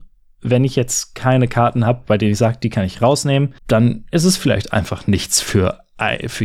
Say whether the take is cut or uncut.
cut